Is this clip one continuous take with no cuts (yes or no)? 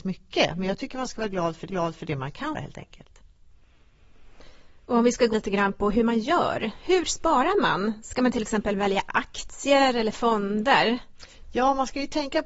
no